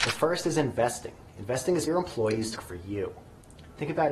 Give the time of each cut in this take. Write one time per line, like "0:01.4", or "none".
0:01.9
0:02.6